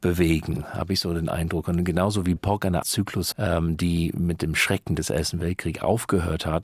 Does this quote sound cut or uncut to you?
cut